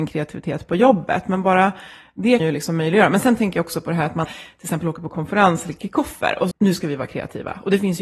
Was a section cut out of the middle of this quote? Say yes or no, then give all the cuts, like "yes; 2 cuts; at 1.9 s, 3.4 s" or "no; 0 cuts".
yes; 3 cuts; at 2.4 s, 4.2 s, 6.5 s